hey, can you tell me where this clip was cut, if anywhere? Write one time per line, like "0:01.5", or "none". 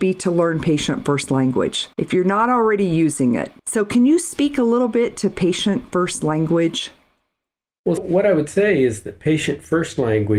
0:01.9
0:03.6
0:08.0